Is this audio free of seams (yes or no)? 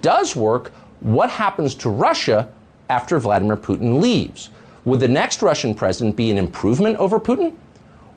yes